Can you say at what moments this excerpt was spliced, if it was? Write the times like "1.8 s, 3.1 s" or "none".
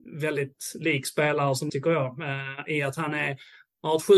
1.7 s

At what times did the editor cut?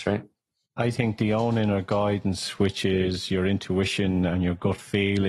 none

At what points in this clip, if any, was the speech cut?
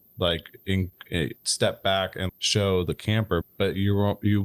1.4 s, 2.3 s, 3.4 s

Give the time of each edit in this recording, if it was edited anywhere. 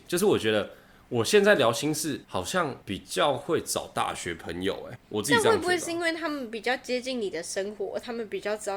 2.2 s, 2.8 s, 5.0 s

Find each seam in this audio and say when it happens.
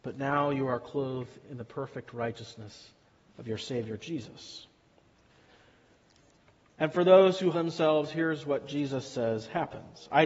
7.5 s

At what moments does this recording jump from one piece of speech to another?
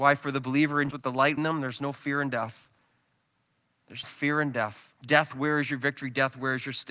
0.9 s, 1.4 s, 4.0 s, 5.0 s

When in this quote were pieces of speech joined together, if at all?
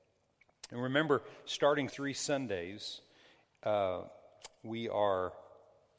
1.9 s

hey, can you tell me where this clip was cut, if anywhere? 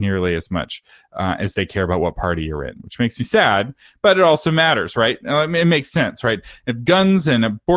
none

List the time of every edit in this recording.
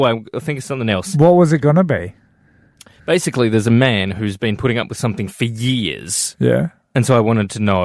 none

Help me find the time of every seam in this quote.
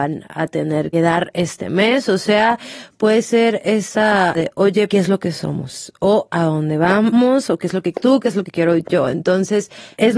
0.9 s, 4.3 s, 4.9 s, 7.9 s

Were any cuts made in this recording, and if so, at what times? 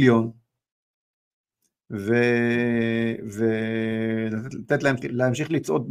5.0 s

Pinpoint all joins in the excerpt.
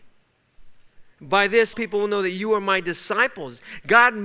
1.7 s

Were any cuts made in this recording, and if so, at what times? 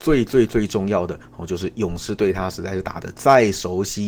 none

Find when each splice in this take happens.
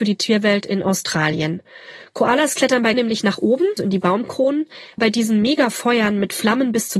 2.9 s, 3.8 s, 5.0 s

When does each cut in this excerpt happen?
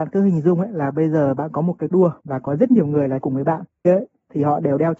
1.9 s, 2.2 s, 3.2 s, 3.8 s

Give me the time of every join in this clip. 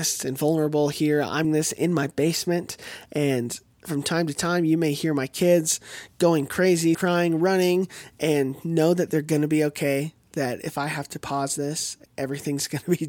1.4 s, 6.9 s, 12.1 s

